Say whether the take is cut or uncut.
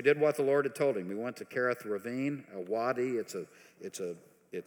uncut